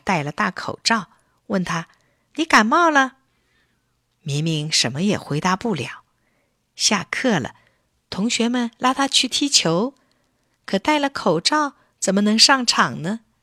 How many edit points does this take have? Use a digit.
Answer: 0